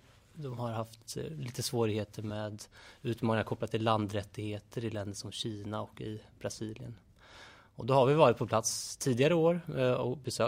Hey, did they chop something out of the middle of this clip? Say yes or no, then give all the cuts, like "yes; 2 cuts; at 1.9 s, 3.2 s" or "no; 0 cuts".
no; 0 cuts